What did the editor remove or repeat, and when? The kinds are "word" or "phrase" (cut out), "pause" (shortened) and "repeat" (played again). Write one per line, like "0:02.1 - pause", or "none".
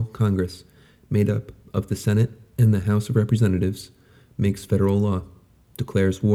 none